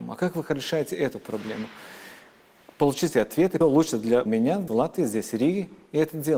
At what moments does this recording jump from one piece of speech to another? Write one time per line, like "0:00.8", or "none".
0:03.1
0:03.6
0:04.3
0:04.7